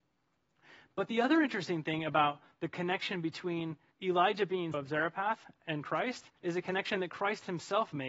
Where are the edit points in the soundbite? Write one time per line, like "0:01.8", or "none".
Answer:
0:03.9
0:04.7
0:06.4